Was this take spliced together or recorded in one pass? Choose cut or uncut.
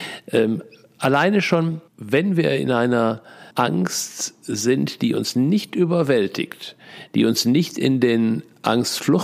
cut